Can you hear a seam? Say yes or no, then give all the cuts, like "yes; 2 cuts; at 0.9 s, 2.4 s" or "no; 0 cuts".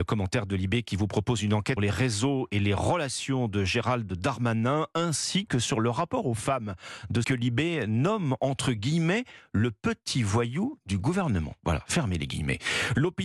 yes; 2 cuts; at 1.8 s, 7.2 s